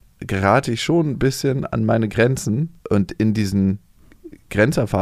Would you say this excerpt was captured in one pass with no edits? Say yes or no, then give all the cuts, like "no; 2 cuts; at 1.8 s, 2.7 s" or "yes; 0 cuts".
no; 1 cut; at 2.8 s